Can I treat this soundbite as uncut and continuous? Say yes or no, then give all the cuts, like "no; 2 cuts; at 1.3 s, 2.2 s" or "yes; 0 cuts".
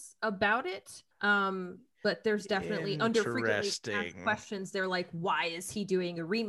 no; 1 cut; at 1.1 s